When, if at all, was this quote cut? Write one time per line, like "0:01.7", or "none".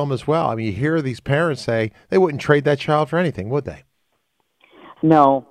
none